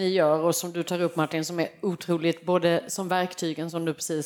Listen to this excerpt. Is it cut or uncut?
uncut